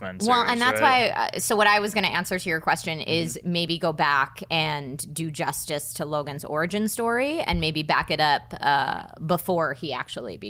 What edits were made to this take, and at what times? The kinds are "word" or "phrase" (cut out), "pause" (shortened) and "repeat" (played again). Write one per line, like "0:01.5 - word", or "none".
none